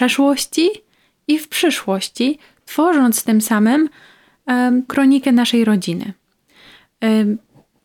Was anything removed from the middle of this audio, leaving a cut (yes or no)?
yes